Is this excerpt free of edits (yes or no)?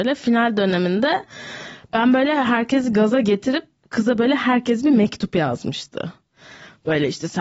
yes